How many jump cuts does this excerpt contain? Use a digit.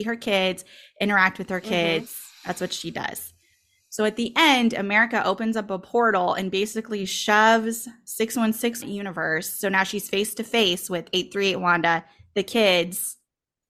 1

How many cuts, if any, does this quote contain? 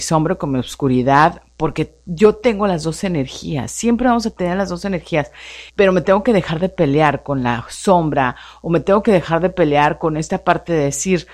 1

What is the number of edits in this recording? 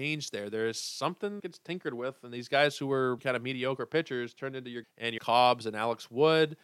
4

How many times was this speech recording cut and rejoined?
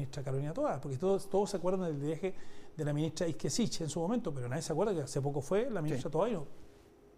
0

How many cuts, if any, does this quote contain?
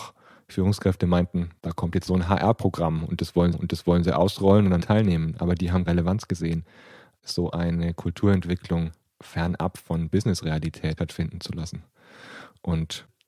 6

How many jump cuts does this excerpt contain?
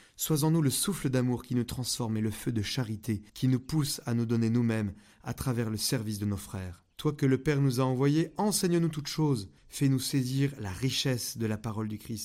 3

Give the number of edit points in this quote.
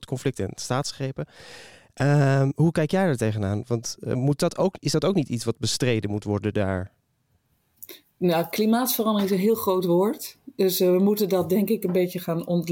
0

